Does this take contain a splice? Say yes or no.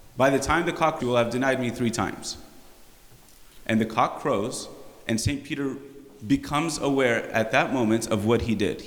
yes